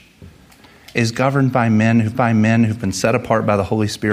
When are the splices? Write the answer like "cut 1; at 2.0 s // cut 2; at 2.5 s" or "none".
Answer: cut 1; at 2.1 s